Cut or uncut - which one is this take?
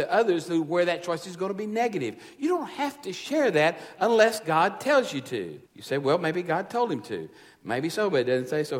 cut